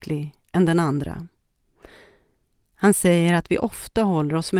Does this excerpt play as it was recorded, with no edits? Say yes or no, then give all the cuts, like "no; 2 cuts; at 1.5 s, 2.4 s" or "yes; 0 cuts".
yes; 0 cuts